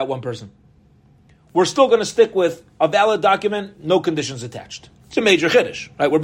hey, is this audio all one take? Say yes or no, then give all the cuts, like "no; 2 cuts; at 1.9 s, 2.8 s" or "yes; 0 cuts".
no; 1 cut; at 5.0 s